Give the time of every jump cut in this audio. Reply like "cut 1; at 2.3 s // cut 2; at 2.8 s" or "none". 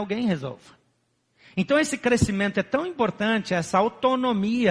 none